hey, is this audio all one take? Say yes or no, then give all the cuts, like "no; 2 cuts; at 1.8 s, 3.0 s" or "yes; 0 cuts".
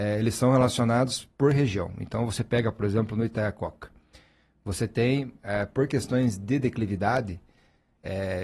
yes; 0 cuts